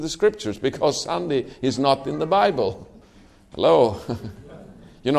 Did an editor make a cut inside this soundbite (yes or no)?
no